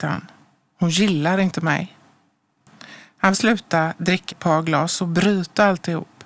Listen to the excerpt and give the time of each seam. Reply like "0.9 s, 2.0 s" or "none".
3.3 s, 4.3 s

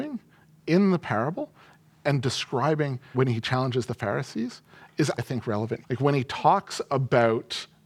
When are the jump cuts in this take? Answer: 3.1 s, 5.2 s, 5.8 s

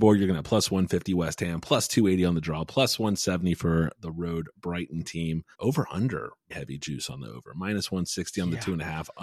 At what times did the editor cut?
3.9 s, 5.5 s, 6.5 s

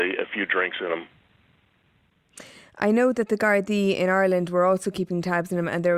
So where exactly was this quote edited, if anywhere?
none

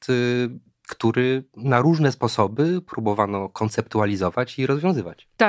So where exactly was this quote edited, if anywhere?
none

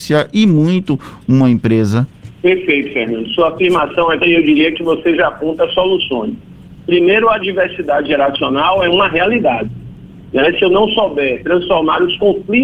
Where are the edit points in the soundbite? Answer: 2.3 s, 4.2 s

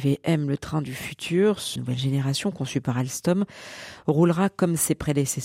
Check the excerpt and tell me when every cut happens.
1.8 s

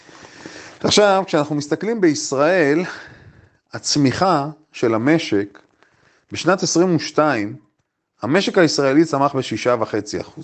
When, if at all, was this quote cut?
none

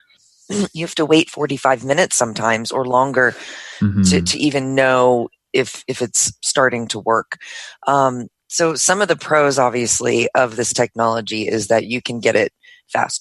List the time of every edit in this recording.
none

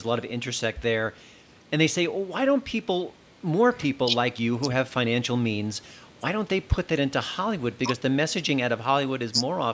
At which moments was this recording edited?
none

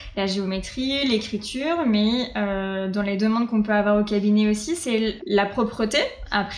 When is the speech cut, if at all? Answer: 5.2 s

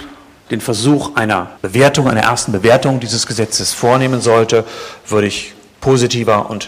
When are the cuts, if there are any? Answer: 1.6 s

